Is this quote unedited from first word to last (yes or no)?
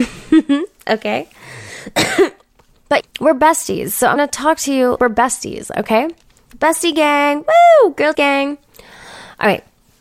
no